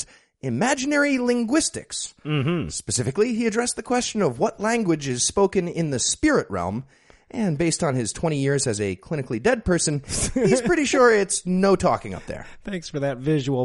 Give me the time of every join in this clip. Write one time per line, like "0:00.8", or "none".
none